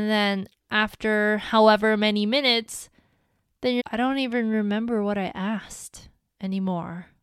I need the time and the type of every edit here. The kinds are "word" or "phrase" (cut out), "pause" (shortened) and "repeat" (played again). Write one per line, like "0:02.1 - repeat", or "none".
0:03.8 - word

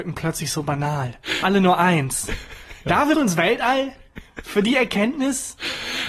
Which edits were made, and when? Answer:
0:01.4 - word
0:03.1 - word

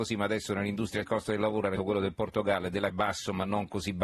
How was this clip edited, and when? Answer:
0:01.0 - word
0:01.8 - word
0:02.9 - word

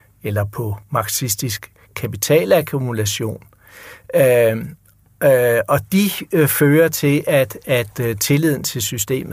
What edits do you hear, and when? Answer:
none

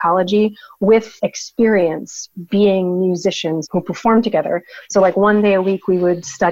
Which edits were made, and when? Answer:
0:01.2 - word
0:03.7 - word

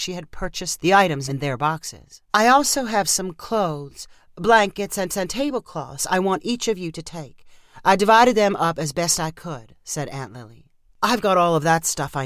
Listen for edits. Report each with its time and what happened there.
0:01.3 - word
0:02.3 - pause
0:05.1 - repeat
0:10.9 - pause

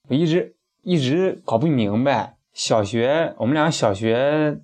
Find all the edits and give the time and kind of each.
0:02.4 - pause

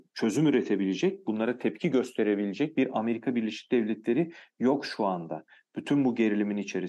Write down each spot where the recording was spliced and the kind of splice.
none

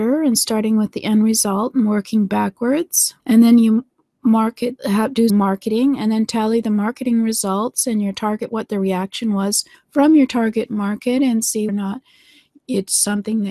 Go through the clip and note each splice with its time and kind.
0:03.2 - pause
0:04.8 - word
0:05.3 - word
0:08.5 - word
0:09.7 - pause
0:11.7 - word

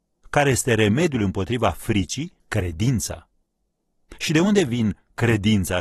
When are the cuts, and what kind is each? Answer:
0:02.4 - pause

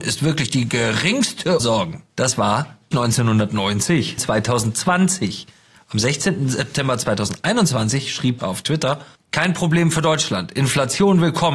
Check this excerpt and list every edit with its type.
0:01.6 - word
0:02.1 - pause
0:02.9 - word
0:04.2 - word
0:08.4 - word
0:09.2 - pause

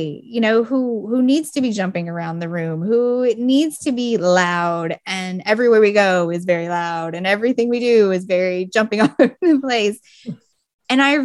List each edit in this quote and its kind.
none

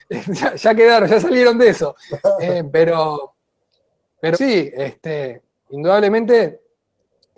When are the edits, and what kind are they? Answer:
0:02.0 - pause
0:04.3 - word

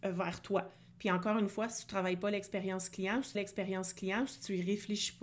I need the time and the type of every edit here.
0:03.3 - repeat

